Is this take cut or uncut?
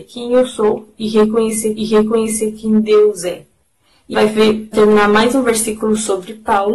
cut